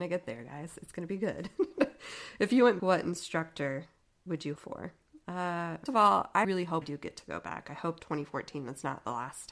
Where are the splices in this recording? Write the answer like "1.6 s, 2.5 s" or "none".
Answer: 2.8 s, 4.6 s, 5.9 s, 6.4 s, 6.8 s, 8.0 s